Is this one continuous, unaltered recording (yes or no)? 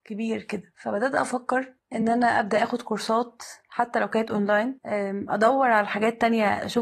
yes